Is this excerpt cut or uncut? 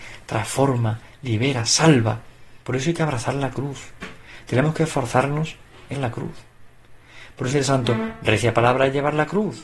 cut